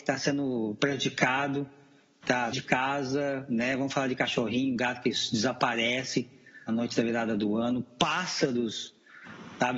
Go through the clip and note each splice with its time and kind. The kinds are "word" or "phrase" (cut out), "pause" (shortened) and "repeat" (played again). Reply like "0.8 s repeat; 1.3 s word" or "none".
2.5 s word; 6.7 s word